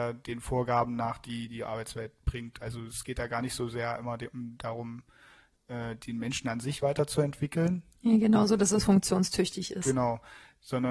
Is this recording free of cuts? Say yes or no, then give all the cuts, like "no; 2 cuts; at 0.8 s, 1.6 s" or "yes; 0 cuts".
yes; 0 cuts